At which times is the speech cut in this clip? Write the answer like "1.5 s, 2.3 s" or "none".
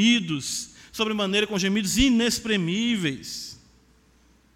none